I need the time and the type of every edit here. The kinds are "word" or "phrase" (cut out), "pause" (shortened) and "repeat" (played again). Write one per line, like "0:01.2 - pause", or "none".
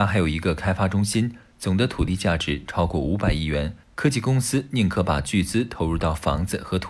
0:03.8 - pause

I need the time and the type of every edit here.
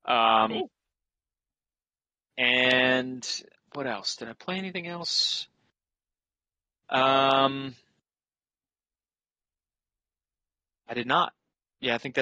none

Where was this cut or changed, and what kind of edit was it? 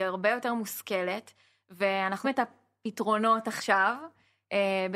0:02.2 - word

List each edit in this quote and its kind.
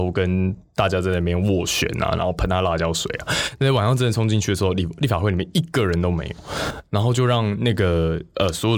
none

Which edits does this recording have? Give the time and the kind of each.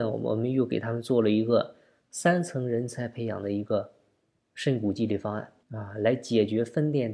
0:05.6 - pause

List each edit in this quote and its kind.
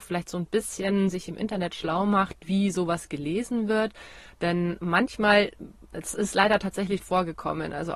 0:07.0 - word

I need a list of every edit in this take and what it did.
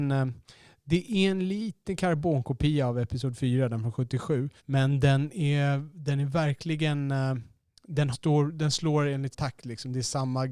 0:01.8 - phrase
0:04.6 - pause
0:08.1 - phrase
0:09.3 - word

